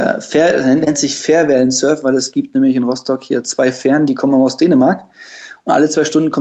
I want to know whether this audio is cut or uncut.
uncut